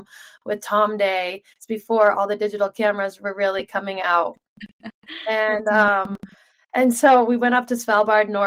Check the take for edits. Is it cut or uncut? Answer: uncut